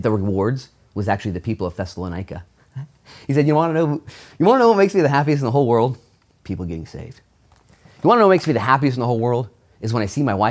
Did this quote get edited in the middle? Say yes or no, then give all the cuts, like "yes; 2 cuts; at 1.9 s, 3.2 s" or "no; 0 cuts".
no; 0 cuts